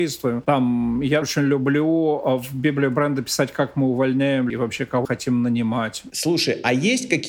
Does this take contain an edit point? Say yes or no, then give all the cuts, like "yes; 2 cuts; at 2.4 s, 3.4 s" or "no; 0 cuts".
yes; 3 cuts; at 1.2 s, 4.5 s, 5.0 s